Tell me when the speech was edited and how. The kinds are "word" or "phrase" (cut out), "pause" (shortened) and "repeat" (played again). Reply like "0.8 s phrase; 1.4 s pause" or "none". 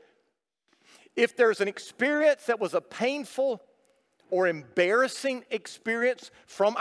none